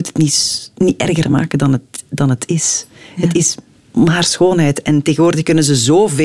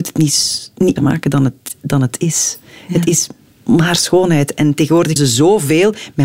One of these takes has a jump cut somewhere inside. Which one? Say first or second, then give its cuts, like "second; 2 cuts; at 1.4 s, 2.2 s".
second; 2 cuts; at 1.0 s, 5.2 s